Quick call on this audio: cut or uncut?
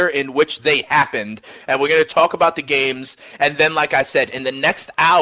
uncut